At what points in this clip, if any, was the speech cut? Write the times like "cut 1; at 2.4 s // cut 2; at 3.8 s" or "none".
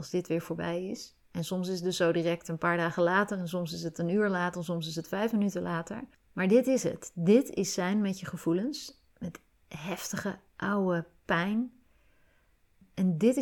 cut 1; at 9.1 s